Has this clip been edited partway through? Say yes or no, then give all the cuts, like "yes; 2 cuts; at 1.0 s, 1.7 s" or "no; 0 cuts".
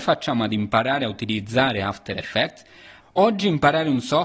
no; 0 cuts